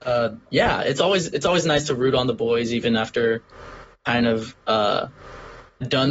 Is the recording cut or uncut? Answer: uncut